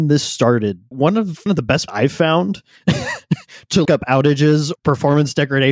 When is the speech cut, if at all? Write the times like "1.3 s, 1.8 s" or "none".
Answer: 0.9 s, 1.5 s, 1.9 s, 3.8 s, 4.7 s